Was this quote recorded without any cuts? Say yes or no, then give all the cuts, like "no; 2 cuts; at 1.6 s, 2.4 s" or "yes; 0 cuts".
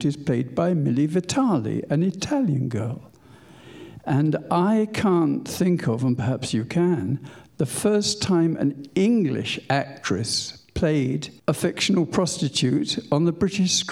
no; 1 cut; at 11.4 s